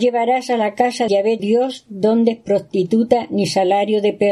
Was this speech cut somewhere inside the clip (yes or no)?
yes